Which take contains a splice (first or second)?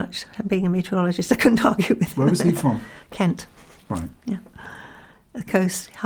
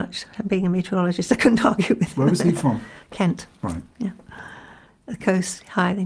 second